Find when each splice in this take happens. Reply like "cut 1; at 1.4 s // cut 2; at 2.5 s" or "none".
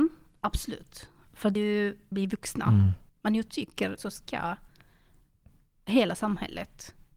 cut 1; at 1.6 s // cut 2; at 2.1 s // cut 3; at 3.1 s // cut 4; at 4.0 s